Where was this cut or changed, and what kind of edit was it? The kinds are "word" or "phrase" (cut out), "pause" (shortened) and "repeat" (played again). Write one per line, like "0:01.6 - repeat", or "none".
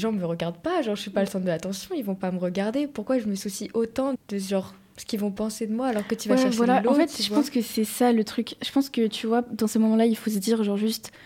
0:04.2 - word